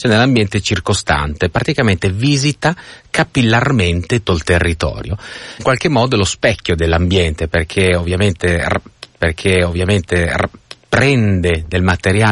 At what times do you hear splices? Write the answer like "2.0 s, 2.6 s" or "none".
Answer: 4.3 s, 5.6 s, 9.2 s